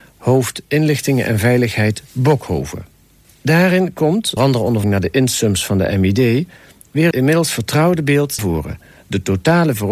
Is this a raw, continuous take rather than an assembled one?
no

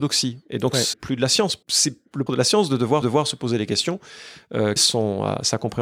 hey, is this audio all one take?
no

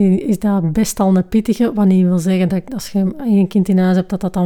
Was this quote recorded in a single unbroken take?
yes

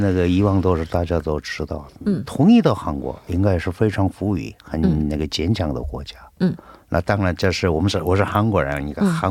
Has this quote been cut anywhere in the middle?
no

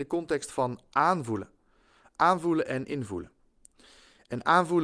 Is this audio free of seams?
yes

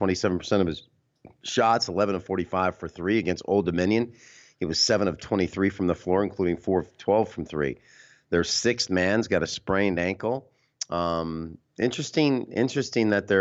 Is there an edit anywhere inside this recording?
no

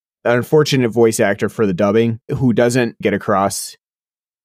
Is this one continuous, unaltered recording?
no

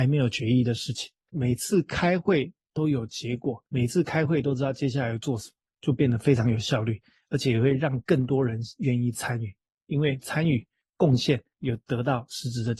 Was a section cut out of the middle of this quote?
yes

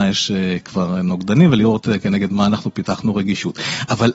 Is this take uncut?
yes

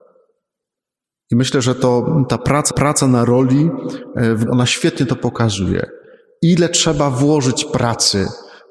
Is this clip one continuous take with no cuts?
no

